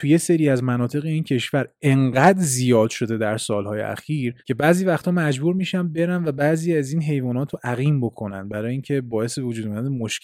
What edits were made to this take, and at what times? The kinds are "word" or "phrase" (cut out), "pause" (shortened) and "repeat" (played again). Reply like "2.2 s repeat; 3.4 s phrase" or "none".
4.4 s pause